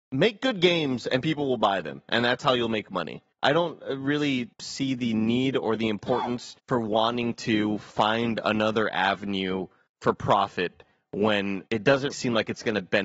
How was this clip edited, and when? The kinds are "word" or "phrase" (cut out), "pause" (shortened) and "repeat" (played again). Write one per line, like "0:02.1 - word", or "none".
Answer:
0:03.3 - pause
0:04.5 - pause
0:06.6 - pause
0:09.9 - pause
0:11.7 - pause
0:12.1 - word